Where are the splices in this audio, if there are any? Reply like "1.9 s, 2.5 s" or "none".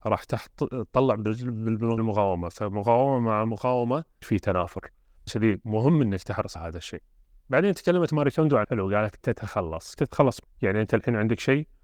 2.0 s, 4.2 s, 5.3 s, 6.6 s, 8.6 s, 9.2 s, 10.0 s, 10.4 s